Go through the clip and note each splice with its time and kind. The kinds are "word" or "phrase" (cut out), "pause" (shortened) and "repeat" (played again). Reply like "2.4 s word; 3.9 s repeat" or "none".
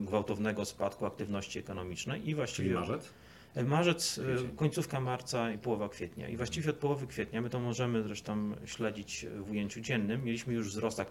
none